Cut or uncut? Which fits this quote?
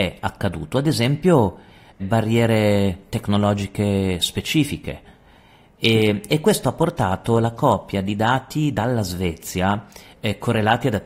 cut